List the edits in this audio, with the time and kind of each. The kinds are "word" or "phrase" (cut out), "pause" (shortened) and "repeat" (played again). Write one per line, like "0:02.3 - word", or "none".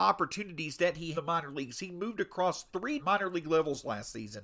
0:01.1 - phrase
0:03.0 - word

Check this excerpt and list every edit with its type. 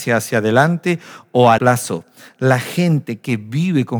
0:01.6 - word

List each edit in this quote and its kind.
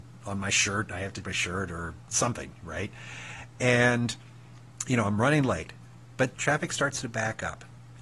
0:01.2 - word
0:06.3 - word

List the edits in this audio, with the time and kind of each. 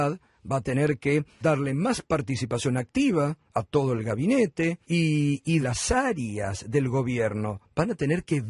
0:01.4 - word
0:04.8 - pause
0:05.6 - word

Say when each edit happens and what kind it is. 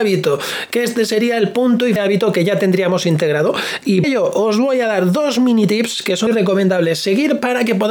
0:02.0 - phrase
0:04.0 - word
0:06.3 - word

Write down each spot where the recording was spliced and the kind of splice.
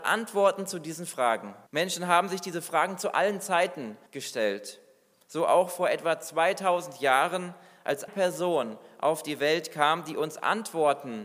0:01.7 - pause
0:04.1 - pause
0:08.1 - word

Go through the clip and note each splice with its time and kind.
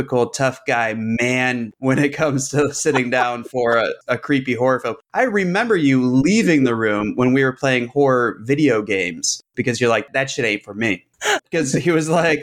0:11.4 - word

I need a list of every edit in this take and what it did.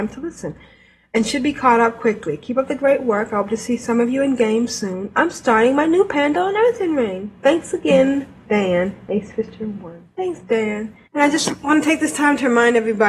0:10.1 - pause
0:11.0 - pause

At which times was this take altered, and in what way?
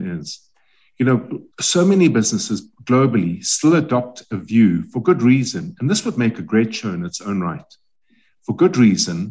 0:01.5 - pause

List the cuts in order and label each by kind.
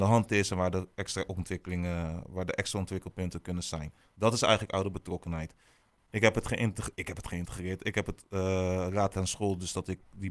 0:06.9 - word
0:09.1 - word

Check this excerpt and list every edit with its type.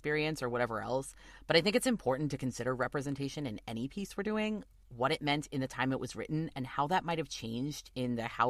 none

